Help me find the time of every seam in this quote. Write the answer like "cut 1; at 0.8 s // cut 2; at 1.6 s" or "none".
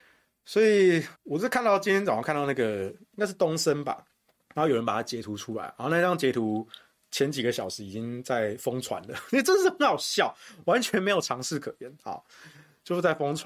cut 1; at 1.1 s // cut 2; at 4.3 s